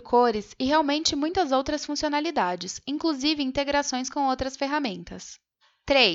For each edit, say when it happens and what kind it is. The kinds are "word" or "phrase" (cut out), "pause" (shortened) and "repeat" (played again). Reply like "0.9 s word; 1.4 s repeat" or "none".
none